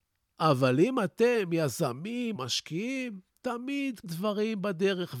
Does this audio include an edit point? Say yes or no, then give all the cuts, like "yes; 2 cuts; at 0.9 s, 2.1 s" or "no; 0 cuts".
yes; 2 cuts; at 2.3 s, 4.0 s